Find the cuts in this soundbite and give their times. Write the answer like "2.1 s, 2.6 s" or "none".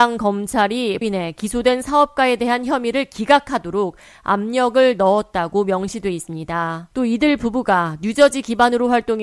1.0 s, 6.9 s